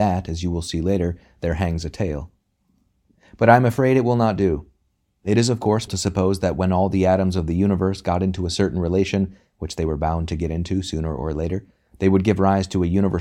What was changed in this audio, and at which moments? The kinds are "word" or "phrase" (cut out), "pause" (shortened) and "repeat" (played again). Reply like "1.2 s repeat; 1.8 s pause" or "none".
5.9 s word